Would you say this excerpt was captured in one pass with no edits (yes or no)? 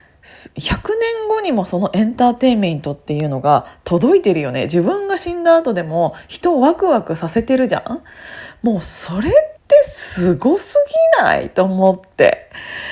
no